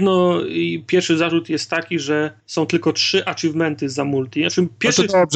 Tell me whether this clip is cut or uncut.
cut